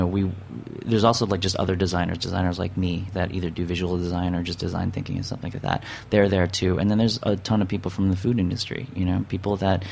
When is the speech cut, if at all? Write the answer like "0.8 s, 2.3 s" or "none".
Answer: 3.1 s